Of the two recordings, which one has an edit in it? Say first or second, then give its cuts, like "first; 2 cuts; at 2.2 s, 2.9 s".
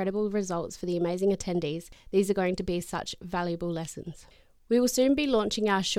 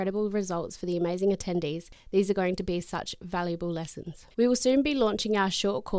second; 1 cut; at 4.3 s